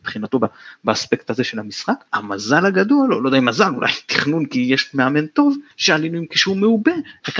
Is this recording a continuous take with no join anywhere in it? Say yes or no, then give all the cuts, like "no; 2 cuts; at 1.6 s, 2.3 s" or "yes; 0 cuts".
no; 2 cuts; at 2.1 s, 5.7 s